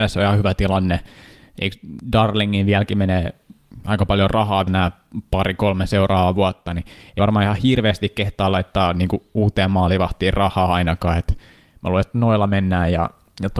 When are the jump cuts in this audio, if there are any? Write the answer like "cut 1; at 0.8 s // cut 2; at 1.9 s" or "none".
cut 1; at 4.7 s // cut 2; at 7.2 s